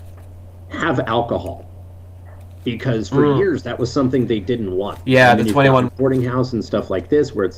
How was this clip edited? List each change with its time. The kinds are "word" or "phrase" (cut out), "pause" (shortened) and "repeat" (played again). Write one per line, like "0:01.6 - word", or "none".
0:05.9 - word